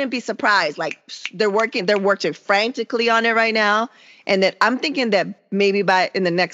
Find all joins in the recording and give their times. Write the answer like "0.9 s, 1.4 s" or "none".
none